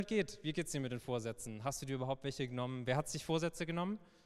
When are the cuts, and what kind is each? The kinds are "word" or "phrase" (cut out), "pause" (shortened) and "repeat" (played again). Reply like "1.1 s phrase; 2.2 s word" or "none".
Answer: none